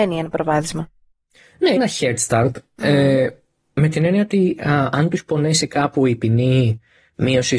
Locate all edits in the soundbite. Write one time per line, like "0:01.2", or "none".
0:01.8